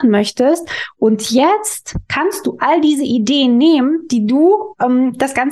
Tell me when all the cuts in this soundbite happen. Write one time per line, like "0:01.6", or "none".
none